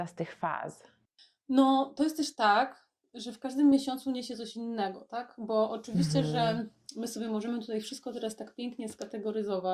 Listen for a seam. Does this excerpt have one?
no; 0 cuts

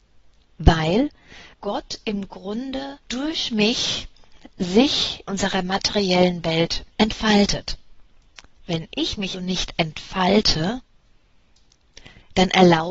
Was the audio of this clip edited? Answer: yes; 5 cuts; at 1.5 s, 3.0 s, 5.3 s, 6.9 s, 9.3 s

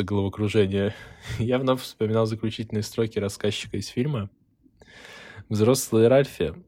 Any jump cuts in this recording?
no; 0 cuts

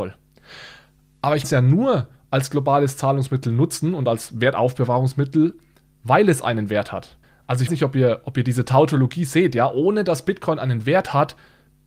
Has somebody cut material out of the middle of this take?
yes; 3 cuts; at 1.4 s, 7.2 s, 7.7 s

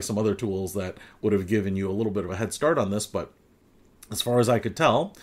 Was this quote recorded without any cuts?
yes; 0 cuts

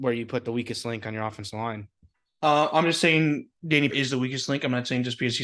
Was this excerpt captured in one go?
no; 1 cut; at 3.9 s

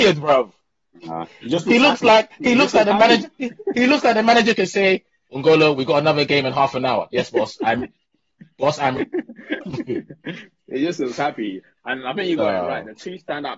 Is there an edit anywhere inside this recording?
no; 0 cuts

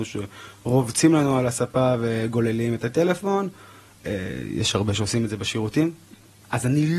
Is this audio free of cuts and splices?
yes; 0 cuts

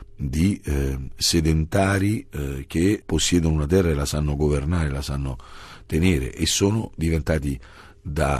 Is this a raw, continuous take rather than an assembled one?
yes; 0 cuts

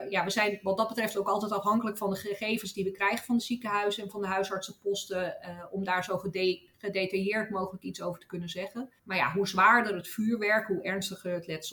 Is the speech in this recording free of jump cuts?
no; 1 cut; at 9.0 s

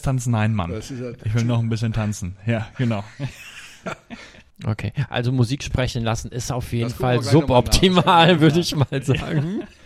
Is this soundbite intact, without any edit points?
yes; 0 cuts

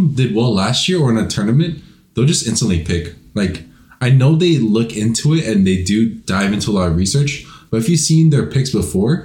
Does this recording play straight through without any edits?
yes; 0 cuts

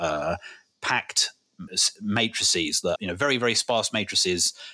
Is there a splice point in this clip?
yes; 2 cuts; at 1.7 s, 3.0 s

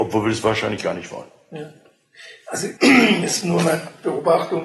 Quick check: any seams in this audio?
yes; 1 cut; at 2.8 s

